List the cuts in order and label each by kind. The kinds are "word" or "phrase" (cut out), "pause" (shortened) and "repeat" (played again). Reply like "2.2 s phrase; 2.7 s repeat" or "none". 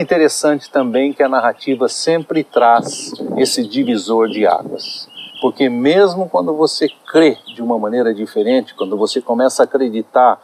5.3 s pause